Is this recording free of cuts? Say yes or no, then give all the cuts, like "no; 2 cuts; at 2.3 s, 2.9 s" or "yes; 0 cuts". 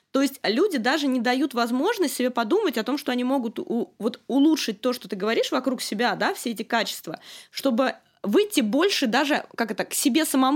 yes; 0 cuts